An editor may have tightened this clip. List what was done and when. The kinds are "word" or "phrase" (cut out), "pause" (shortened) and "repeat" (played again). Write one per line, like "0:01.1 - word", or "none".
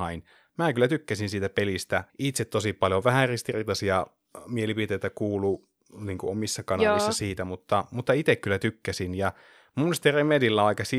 0:02.1 - pause